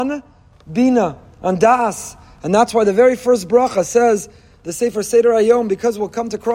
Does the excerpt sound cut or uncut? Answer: uncut